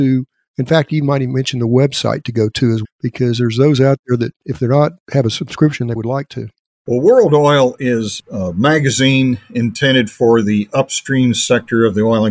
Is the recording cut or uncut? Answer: cut